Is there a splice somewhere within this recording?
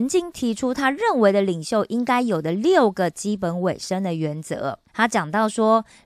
yes; 1 cut; at 4.9 s

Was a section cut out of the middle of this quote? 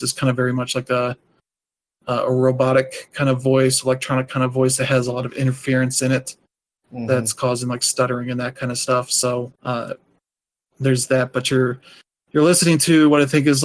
yes; 1 cut; at 9.5 s

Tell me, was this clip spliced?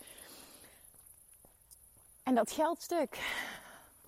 no; 0 cuts

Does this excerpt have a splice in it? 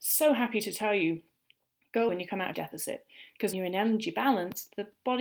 yes; 3 cuts; at 2.1 s, 2.5 s, 3.5 s

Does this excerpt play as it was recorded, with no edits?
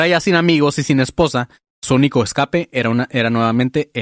yes; 0 cuts

